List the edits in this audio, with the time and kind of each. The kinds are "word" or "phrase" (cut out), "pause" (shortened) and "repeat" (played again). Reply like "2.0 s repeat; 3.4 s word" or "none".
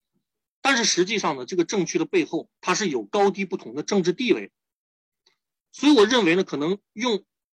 2.6 s pause